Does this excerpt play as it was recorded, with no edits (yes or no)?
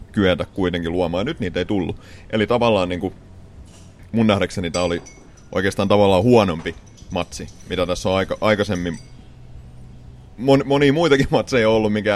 yes